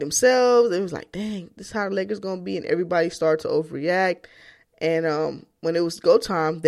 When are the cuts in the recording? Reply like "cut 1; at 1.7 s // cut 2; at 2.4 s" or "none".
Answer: none